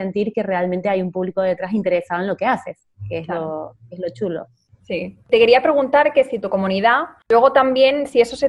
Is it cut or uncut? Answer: uncut